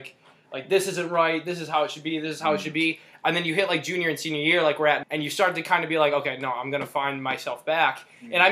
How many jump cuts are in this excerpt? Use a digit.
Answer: 1